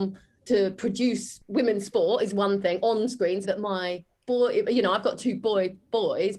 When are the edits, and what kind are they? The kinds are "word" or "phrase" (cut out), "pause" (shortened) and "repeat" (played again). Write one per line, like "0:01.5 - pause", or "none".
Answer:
0:03.4 - word